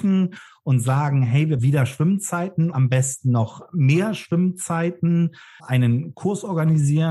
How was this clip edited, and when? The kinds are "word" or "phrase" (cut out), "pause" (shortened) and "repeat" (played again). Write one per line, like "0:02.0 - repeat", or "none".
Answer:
0:01.6 - word
0:02.7 - word
0:05.6 - word